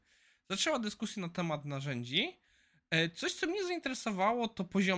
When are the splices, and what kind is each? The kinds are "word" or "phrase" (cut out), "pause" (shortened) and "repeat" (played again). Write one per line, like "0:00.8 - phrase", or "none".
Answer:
none